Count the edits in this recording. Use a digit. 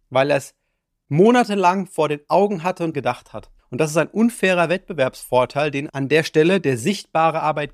2